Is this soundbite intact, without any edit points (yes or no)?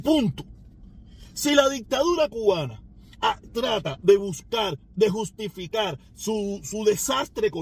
yes